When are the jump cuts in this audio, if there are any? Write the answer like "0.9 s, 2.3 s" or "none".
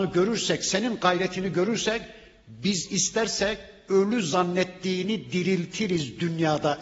none